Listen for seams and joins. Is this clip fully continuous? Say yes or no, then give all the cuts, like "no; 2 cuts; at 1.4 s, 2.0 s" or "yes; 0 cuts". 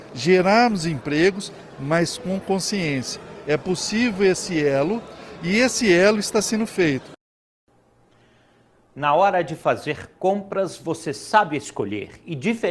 yes; 0 cuts